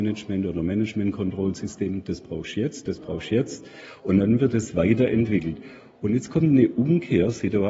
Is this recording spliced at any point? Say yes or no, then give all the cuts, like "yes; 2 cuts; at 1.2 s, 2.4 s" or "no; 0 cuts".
no; 0 cuts